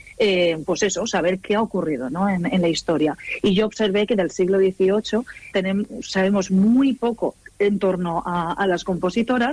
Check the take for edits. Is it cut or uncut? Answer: cut